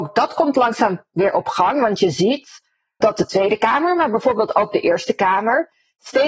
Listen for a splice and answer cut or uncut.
cut